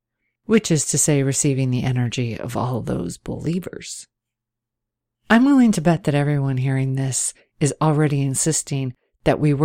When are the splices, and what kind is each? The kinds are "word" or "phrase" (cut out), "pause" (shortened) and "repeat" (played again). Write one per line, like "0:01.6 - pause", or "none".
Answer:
none